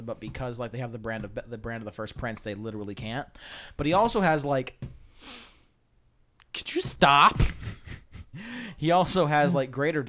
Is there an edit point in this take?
no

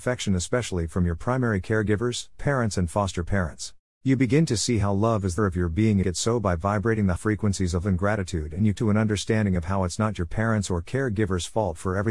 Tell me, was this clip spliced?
yes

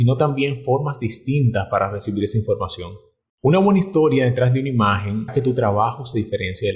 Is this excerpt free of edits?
no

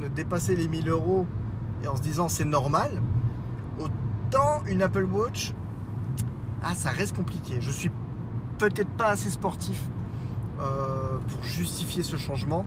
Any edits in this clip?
no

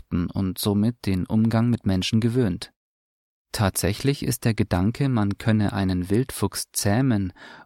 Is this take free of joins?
yes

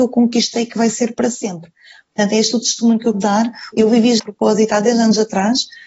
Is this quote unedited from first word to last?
no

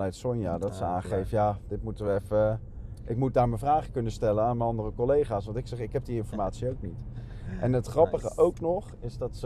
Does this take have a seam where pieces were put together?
no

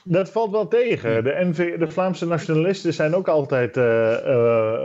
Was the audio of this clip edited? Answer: no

